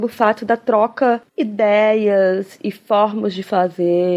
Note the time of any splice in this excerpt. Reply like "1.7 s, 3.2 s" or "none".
1.2 s